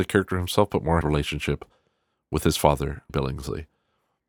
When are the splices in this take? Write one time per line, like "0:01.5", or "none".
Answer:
0:01.0
0:03.1